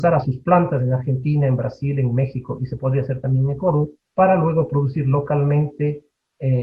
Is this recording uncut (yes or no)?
no